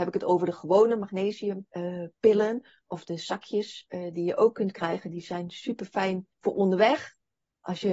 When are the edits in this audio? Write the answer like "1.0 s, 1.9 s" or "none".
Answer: 1.7 s, 6.3 s